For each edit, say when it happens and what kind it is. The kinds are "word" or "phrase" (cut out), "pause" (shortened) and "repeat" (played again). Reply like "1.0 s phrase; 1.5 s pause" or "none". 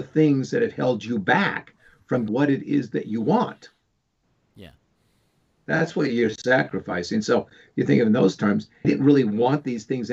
2.3 s word; 8.8 s word